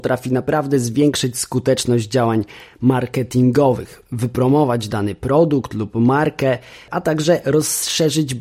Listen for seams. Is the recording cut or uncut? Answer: uncut